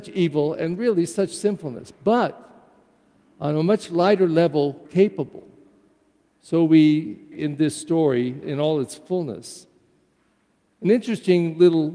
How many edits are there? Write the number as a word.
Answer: three